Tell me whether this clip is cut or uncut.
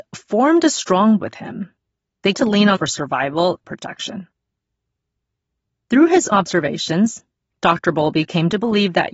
cut